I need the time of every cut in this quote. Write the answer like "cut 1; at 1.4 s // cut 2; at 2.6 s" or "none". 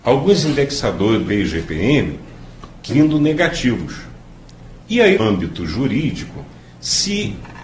cut 1; at 1.3 s // cut 2; at 2.9 s // cut 3; at 4.8 s // cut 4; at 5.2 s